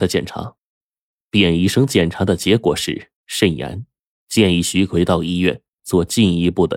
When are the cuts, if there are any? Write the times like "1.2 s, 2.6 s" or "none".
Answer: 3.2 s

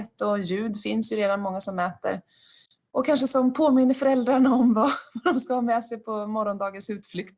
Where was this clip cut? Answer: none

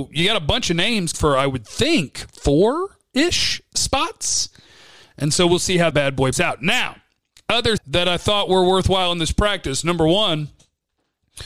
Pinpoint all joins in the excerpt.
1.1 s, 5.9 s, 6.3 s, 7.8 s

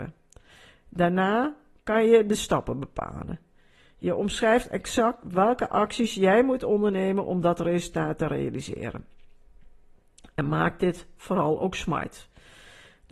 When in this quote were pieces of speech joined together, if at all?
none

